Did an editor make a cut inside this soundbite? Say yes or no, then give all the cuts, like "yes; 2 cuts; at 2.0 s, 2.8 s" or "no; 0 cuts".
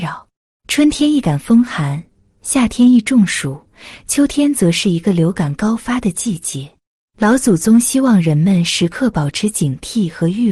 no; 0 cuts